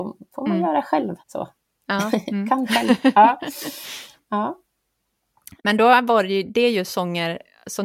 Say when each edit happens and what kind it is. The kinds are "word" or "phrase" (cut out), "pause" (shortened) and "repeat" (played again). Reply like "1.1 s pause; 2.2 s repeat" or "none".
1.2 s pause; 5.6 s pause